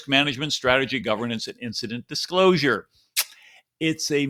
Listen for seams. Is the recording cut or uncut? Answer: uncut